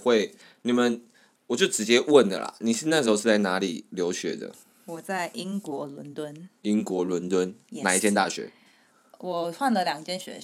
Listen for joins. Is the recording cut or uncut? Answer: uncut